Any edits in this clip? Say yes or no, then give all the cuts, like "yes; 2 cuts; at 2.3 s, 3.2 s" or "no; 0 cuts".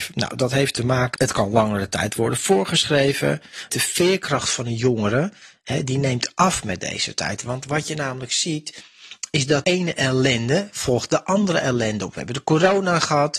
yes; 3 cuts; at 1.1 s, 3.7 s, 9.6 s